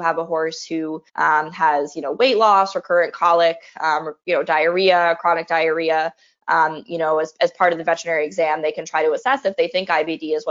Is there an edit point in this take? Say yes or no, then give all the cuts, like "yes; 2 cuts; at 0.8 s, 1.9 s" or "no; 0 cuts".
yes; 1 cut; at 1.1 s